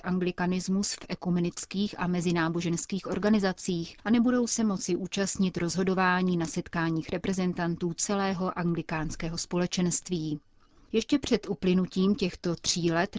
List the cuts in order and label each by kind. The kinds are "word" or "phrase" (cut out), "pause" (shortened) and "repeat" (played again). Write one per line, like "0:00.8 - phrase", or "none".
none